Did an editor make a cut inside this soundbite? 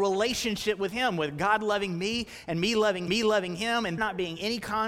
yes; 2 cuts; at 3.1 s, 4.0 s

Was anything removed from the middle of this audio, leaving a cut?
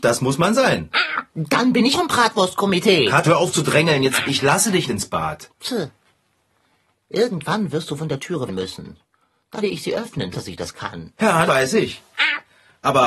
yes; 8 cuts; at 1.9 s, 3.2 s, 4.2 s, 4.9 s, 8.5 s, 9.6 s, 10.3 s, 11.5 s

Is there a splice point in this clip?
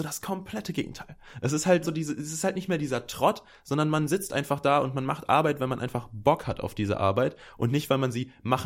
yes; 1 cut; at 1.8 s

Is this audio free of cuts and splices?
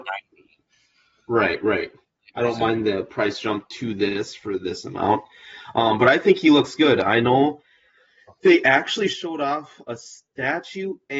yes; 0 cuts

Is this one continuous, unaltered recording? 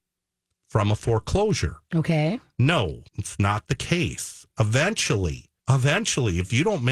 no; 2 cuts; at 3.1 s, 5.6 s

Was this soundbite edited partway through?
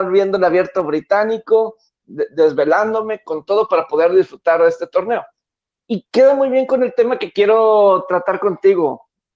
no; 0 cuts

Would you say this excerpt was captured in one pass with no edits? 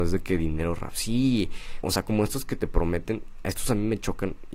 no; 1 cut; at 1.8 s

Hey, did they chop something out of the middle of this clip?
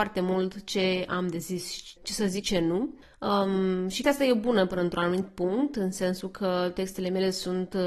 yes; 3 cuts; at 2.0 s, 2.4 s, 4.0 s

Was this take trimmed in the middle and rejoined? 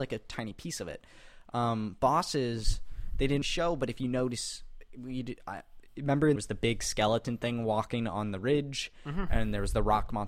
yes; 2 cuts; at 3.4 s, 6.4 s

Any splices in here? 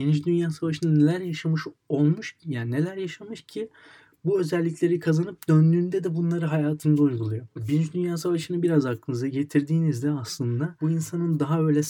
no; 0 cuts

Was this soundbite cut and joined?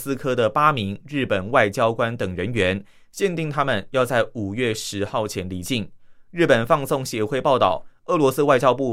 no; 0 cuts

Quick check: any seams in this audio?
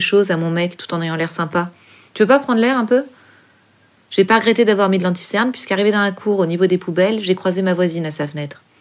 no; 0 cuts

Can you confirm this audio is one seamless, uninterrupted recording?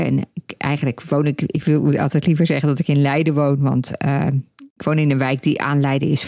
yes; 0 cuts

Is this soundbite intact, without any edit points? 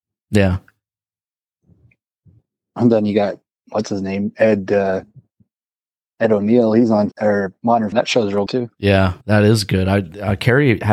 no; 4 cuts; at 7.1 s, 7.9 s, 8.5 s, 9.2 s

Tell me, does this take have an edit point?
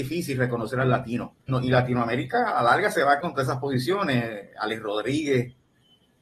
yes; 2 cuts; at 1.5 s, 3.2 s

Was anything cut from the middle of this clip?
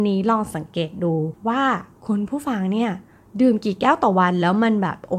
no; 0 cuts

